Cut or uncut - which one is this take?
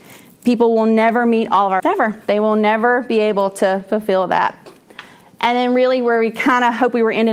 cut